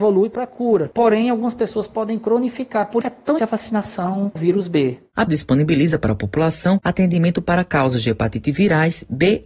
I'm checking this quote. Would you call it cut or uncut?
cut